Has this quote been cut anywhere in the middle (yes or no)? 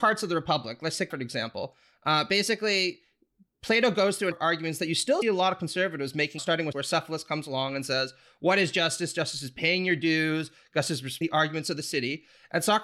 yes